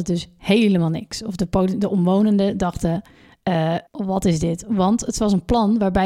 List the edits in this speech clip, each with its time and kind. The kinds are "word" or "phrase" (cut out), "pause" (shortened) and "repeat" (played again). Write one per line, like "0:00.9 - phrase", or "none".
0:03.9 - pause

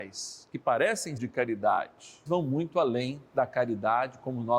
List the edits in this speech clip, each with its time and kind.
0:01.2 - word
0:02.3 - word
0:03.3 - pause

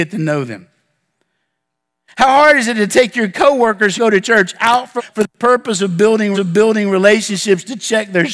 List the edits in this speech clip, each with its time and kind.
0:04.0 - phrase
0:05.0 - word
0:06.3 - repeat

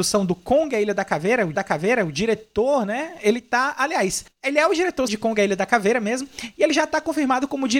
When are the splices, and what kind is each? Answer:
0:01.5 - repeat
0:05.1 - word

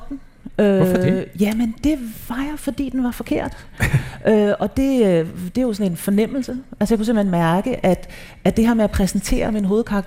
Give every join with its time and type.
none

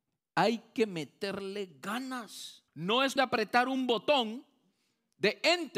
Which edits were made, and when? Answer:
0:02.7 - pause
0:03.2 - word

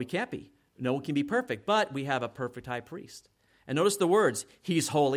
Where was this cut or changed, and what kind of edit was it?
none

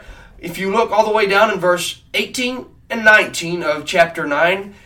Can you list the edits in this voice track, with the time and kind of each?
none

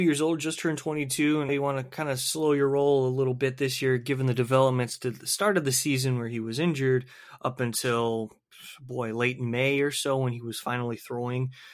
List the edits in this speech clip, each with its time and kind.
0:01.5 - word

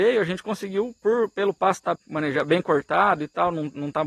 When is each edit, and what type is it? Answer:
0:02.0 - word

